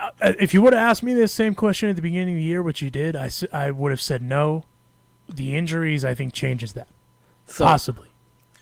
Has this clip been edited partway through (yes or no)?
no